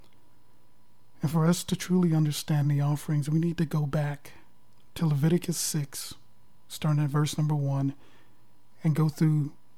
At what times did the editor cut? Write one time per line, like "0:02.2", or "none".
none